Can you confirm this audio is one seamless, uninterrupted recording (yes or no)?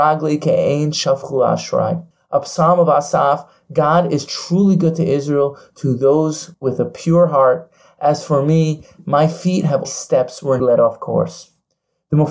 no